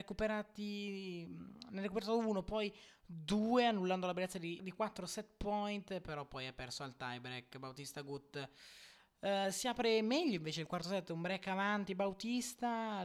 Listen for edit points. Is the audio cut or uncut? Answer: cut